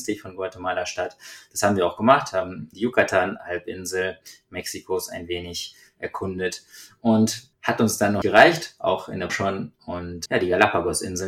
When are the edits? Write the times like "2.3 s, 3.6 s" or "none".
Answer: 2.7 s, 7.5 s, 8.2 s, 9.3 s, 10.3 s